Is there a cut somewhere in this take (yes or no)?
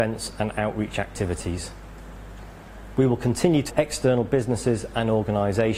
yes